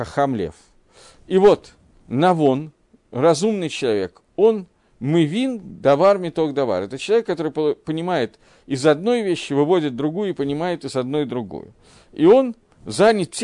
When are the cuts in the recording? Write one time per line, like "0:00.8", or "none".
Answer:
none